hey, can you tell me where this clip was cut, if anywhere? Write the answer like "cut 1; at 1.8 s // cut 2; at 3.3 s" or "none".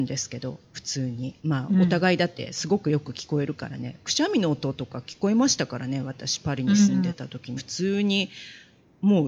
cut 1; at 1.4 s // cut 2; at 7.6 s